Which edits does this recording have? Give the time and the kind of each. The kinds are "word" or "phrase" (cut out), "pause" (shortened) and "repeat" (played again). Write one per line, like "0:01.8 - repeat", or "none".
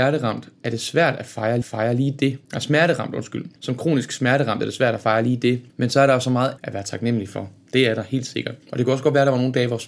0:01.6 - repeat
0:02.4 - pause
0:03.6 - pause
0:05.7 - pause
0:06.6 - word
0:08.6 - pause